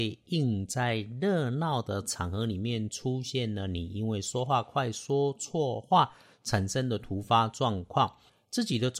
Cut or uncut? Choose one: uncut